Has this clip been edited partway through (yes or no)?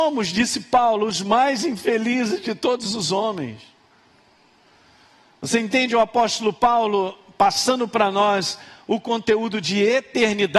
no